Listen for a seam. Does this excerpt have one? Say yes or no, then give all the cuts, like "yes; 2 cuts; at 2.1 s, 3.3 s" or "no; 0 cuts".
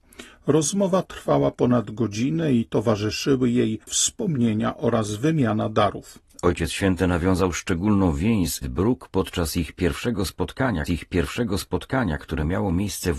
yes; 3 cuts; at 3.9 s, 8.6 s, 10.9 s